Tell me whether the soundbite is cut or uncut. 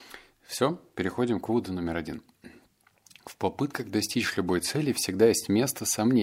uncut